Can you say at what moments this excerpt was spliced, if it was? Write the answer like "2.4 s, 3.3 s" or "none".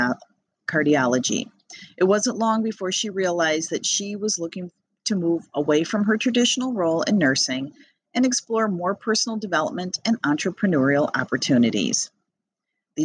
none